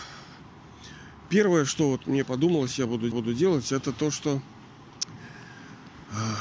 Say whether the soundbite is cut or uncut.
cut